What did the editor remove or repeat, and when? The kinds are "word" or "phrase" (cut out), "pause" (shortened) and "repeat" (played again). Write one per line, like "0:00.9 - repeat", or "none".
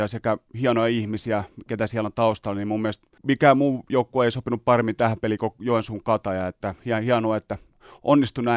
0:03.2 - pause